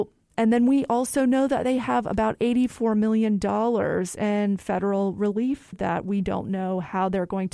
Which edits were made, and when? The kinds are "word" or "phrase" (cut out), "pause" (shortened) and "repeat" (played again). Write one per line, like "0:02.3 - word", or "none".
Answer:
0:05.7 - word

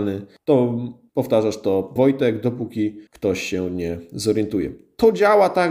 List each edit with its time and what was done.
0:02.0 - phrase
0:03.1 - pause

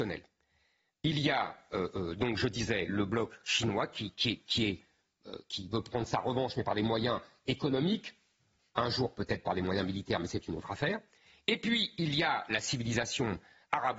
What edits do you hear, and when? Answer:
none

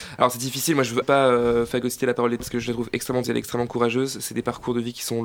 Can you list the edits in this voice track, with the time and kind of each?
0:01.0 - word
0:02.4 - word
0:03.2 - word

